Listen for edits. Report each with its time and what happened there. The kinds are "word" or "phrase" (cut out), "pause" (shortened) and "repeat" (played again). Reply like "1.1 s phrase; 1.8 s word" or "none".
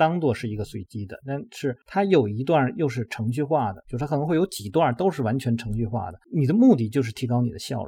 1.8 s pause; 6.2 s pause